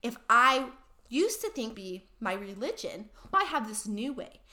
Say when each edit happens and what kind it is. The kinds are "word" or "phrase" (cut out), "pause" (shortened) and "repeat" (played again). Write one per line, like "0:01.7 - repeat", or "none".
0:01.7 - phrase
0:03.3 - word